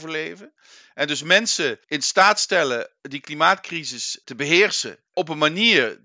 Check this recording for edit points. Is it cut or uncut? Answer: cut